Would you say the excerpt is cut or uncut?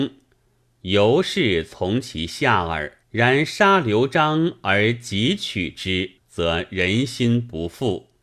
cut